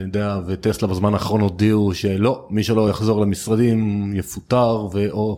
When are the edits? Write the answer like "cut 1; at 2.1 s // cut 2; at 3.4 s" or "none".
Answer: none